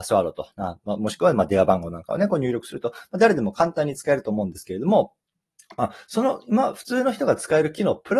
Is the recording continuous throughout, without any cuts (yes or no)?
yes